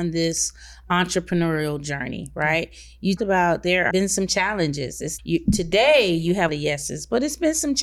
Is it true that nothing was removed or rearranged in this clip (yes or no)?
no